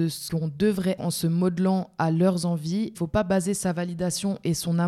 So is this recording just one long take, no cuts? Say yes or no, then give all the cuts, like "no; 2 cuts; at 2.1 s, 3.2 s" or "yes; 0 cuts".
no; 2 cuts; at 1.0 s, 2.9 s